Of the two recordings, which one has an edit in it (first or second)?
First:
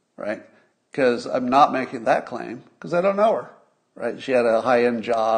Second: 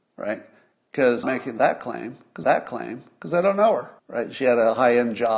second